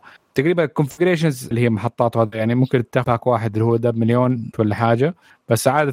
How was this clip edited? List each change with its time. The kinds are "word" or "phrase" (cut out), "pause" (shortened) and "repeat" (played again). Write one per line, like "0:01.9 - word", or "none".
0:01.5 - word
0:03.0 - word
0:04.5 - word